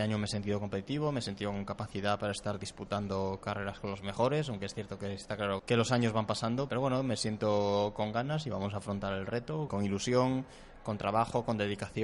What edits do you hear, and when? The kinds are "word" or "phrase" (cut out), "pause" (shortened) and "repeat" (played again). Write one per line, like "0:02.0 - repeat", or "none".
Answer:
0:05.6 - word
0:06.7 - word
0:09.7 - word